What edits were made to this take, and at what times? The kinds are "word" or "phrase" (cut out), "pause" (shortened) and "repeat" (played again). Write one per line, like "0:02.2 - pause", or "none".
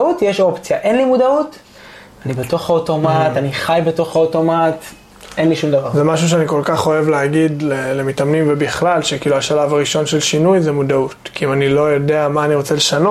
none